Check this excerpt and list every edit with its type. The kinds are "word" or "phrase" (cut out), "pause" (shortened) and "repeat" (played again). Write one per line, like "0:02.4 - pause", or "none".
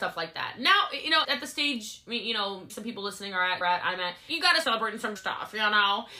0:01.2 - word
0:02.7 - word
0:03.6 - word
0:04.3 - word
0:04.6 - word
0:05.2 - word